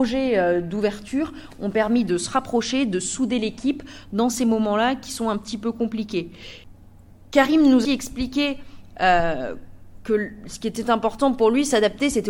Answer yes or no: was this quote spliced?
yes